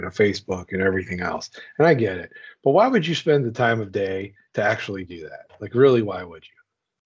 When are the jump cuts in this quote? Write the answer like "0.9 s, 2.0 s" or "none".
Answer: none